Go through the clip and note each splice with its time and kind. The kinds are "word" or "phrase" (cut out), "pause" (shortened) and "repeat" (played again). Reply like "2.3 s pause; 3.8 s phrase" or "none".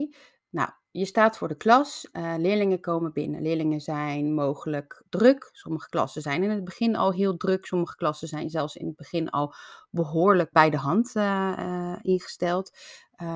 2.1 s word; 5.1 s word; 10.5 s word